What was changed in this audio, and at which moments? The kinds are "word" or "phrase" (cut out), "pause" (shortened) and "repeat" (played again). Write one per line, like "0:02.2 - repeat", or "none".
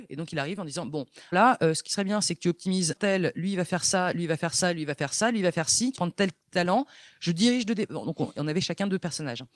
0:01.3 - word
0:03.0 - word
0:05.9 - word